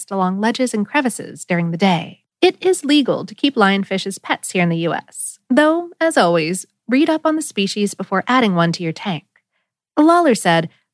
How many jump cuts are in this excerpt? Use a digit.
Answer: 1